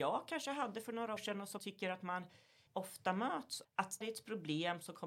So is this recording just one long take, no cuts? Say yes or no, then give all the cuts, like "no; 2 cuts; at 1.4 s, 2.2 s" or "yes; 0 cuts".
no; 5 cuts; at 1.2 s, 1.6 s, 2.7 s, 3.6 s, 4.0 s